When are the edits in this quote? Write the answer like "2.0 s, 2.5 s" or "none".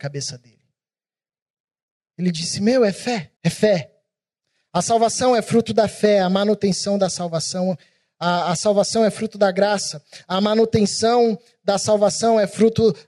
3.4 s, 4.4 s